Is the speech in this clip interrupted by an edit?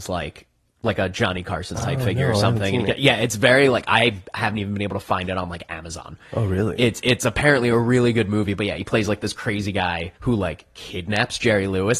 yes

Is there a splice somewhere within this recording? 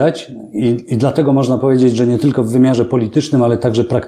no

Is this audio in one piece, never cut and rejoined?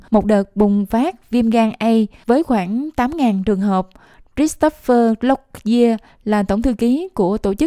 yes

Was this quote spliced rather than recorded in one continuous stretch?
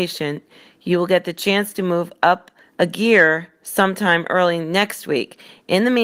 yes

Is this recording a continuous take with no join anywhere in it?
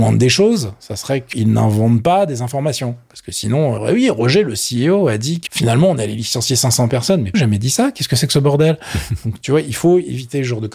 no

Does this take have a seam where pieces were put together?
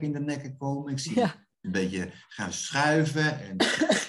no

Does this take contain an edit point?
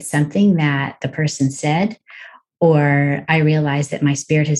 no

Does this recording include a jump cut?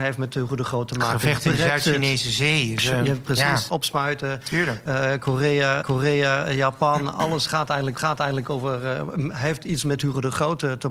yes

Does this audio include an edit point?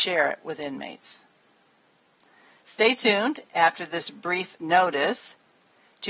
no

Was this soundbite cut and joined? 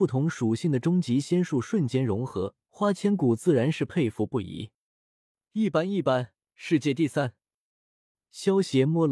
yes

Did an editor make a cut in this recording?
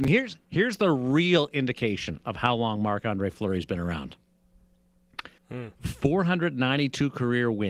yes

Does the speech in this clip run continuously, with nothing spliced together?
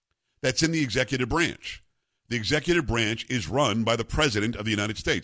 yes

